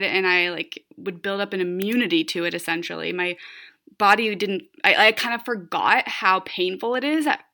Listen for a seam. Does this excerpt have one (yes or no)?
no